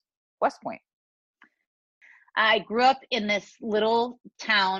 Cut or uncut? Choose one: uncut